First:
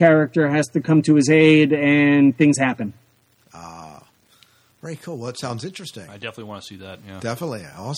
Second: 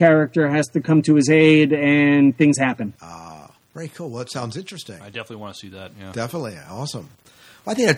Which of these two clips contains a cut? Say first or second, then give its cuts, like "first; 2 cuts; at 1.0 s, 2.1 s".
second; 2 cuts; at 2.9 s, 3.6 s